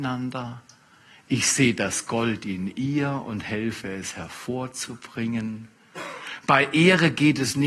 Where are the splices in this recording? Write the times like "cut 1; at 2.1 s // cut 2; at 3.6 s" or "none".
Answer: none